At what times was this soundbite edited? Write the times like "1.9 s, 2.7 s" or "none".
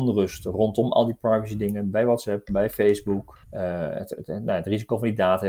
3.4 s